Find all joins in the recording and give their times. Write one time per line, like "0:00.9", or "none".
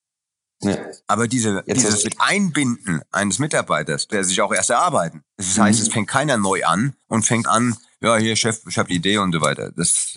0:01.0
0:02.0
0:04.1
0:05.3
0:07.0
0:07.4
0:08.9

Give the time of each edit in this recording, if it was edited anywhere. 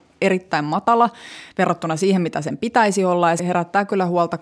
0:03.4

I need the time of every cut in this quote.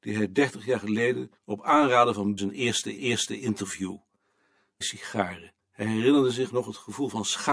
0:01.4
0:02.4
0:03.0
0:04.8
0:05.6

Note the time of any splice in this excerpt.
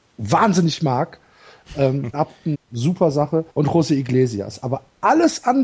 0:02.1
0:02.5
0:03.5

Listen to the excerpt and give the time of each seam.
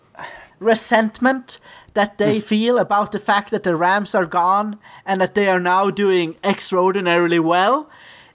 none

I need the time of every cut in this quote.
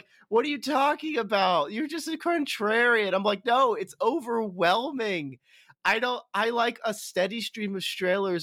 none

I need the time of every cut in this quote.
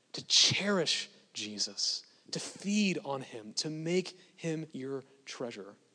0:04.7

